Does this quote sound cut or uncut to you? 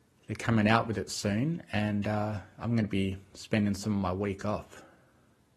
uncut